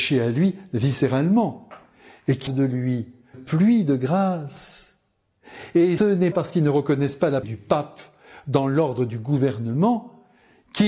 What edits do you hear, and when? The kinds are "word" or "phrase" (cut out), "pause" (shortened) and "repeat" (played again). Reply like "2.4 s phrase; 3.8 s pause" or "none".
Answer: 2.5 s word; 3.3 s word; 6.0 s word; 6.3 s word; 7.4 s word